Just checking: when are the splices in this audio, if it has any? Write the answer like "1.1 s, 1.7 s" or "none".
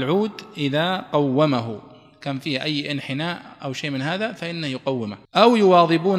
5.2 s